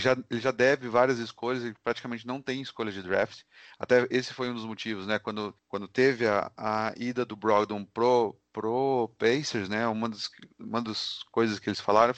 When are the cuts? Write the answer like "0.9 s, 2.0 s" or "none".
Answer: 5.6 s